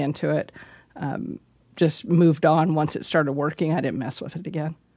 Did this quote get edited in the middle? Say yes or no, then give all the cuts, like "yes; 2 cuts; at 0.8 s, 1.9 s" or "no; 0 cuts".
no; 0 cuts